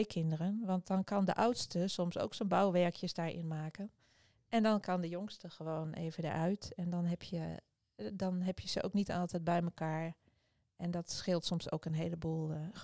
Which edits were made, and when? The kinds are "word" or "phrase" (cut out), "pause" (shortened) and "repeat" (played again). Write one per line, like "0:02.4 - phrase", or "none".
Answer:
none